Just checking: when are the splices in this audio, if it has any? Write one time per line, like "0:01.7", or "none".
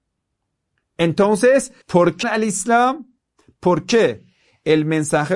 0:01.8
0:02.2